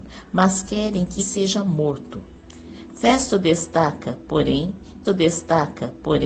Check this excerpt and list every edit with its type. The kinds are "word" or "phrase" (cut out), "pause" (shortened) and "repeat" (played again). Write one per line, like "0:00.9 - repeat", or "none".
0:01.2 - word
0:05.0 - repeat